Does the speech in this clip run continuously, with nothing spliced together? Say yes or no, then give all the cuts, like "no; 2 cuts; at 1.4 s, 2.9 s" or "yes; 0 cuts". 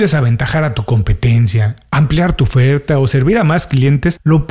yes; 0 cuts